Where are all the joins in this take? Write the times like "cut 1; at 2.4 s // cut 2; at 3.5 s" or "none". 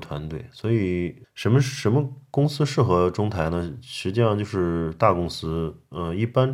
cut 1; at 1.2 s